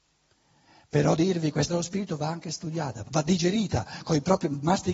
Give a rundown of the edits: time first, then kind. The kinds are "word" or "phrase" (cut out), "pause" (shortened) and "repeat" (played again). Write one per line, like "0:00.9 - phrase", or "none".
0:01.2 - word
0:01.7 - word
0:03.1 - word

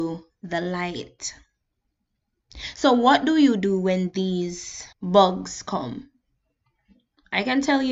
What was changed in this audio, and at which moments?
0:04.9 - pause

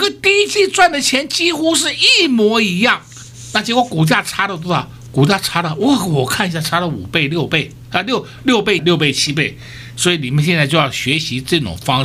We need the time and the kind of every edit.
0:08.8 - phrase

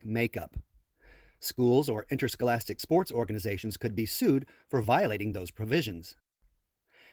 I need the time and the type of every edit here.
none

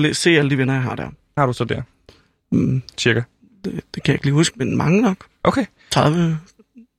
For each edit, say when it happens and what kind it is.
0:01.4 - word
0:04.5 - word

